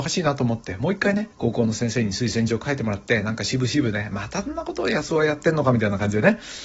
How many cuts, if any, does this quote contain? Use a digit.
1